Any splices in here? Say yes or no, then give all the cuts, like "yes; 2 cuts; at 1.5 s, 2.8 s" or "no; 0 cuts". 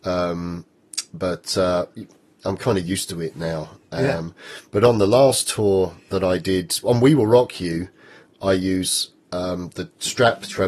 no; 0 cuts